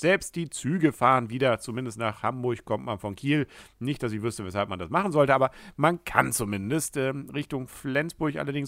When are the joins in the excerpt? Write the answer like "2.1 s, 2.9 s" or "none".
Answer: none